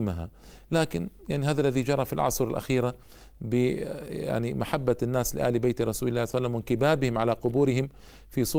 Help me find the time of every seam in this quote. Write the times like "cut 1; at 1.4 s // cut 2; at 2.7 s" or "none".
cut 1; at 6.3 s